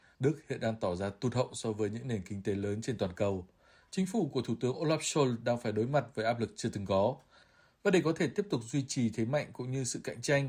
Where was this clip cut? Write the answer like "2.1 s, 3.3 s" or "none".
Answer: none